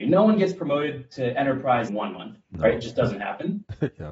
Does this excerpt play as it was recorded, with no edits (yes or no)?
no